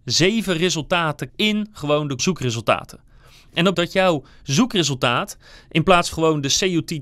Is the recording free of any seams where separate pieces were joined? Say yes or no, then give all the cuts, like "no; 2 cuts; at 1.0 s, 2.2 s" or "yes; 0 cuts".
no; 4 cuts; at 1.3 s, 2.2 s, 3.7 s, 6.1 s